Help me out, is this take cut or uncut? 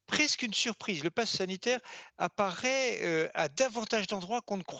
uncut